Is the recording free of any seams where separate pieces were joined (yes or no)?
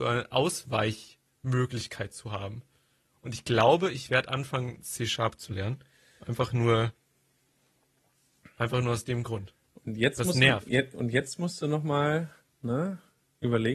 yes